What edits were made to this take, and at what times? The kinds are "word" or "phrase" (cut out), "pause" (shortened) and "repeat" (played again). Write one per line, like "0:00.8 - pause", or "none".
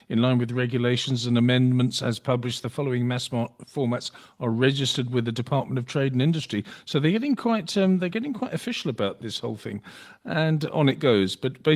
none